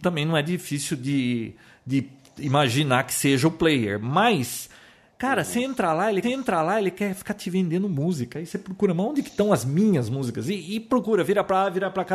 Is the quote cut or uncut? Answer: cut